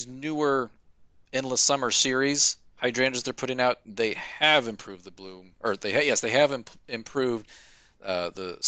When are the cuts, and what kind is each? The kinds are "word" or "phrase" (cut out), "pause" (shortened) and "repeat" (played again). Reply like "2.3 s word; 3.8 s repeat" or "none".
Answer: none